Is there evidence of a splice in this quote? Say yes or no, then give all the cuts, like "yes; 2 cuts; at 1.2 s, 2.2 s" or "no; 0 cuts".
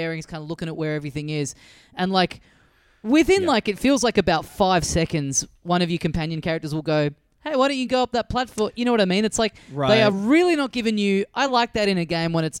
no; 0 cuts